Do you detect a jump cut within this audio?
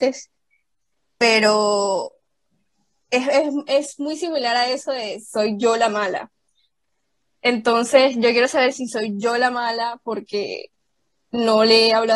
no; 0 cuts

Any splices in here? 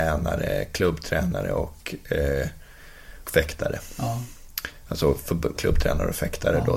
yes; 2 cuts; at 3.2 s, 5.5 s

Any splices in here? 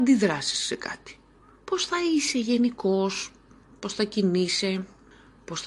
no; 0 cuts

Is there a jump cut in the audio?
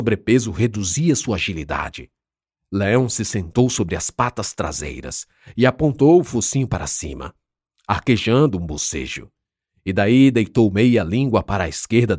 no; 0 cuts

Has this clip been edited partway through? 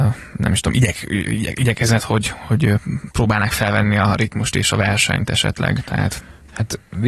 no; 0 cuts

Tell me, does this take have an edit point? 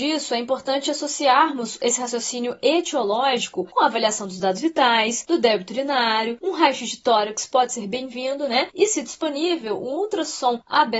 no; 0 cuts

